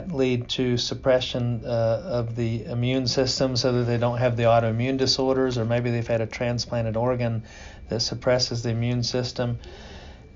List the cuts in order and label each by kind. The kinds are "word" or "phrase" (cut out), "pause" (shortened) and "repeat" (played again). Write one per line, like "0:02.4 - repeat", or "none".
none

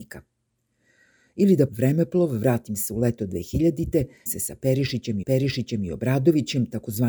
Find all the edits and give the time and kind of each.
0:01.7 - word
0:04.3 - word
0:05.2 - repeat

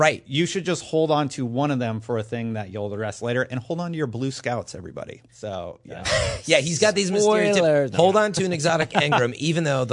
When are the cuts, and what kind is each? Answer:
0:05.3 - pause

